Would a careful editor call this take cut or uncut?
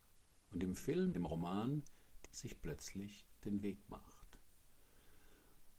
cut